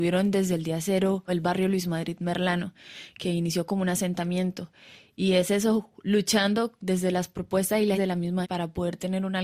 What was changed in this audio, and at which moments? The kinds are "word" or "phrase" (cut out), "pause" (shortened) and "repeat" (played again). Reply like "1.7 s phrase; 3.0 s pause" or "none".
1.3 s word; 7.9 s word; 8.4 s word